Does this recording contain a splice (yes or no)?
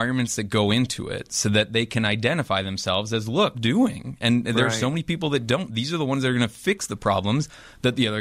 yes